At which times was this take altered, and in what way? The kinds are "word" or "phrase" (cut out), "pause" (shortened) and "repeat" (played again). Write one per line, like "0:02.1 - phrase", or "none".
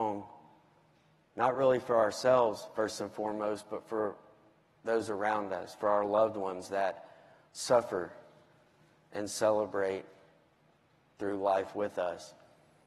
none